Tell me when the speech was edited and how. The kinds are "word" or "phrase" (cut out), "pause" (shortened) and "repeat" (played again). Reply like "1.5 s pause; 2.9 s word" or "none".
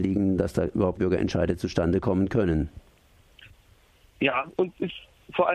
1.0 s word